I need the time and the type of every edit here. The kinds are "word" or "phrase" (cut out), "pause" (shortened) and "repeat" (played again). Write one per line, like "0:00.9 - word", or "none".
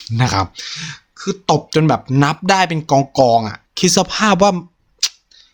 0:03.7 - pause